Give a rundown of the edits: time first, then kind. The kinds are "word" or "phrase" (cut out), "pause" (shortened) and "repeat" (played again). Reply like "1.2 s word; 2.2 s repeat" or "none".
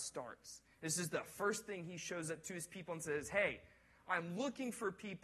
none